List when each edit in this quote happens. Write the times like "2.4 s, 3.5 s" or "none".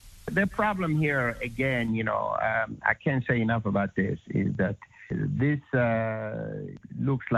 none

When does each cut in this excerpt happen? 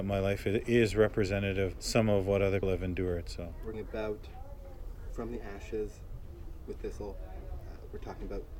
1.7 s, 2.6 s, 3.7 s, 5.1 s, 6.8 s

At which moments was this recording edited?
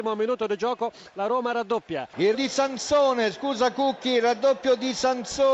2.3 s

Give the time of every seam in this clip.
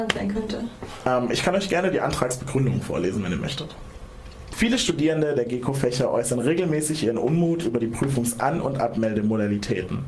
none

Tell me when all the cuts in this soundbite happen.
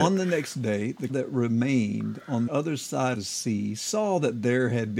1.1 s, 2.5 s, 3.1 s

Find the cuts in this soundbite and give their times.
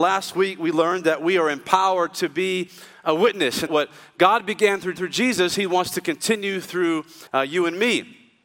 3.7 s, 5.0 s, 7.3 s

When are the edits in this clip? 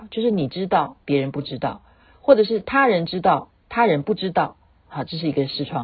1.0 s, 3.6 s

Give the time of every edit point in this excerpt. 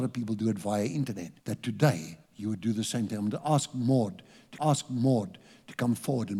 1.4 s, 2.3 s, 4.6 s

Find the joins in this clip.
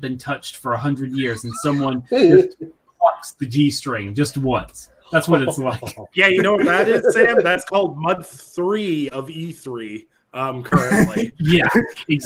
none

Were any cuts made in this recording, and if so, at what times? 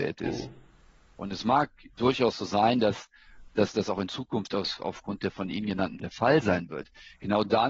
3.5 s, 6.0 s

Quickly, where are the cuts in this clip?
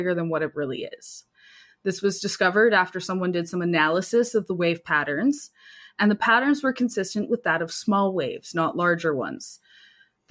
none

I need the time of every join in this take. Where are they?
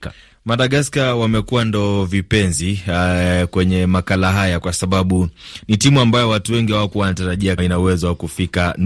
7.6 s

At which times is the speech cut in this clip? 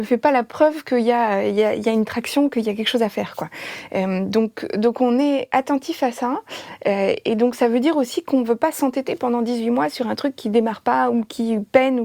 none

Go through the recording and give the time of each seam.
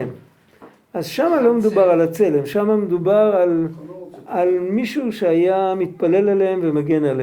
none

